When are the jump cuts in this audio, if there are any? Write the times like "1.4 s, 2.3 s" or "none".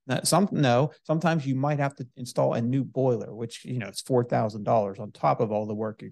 none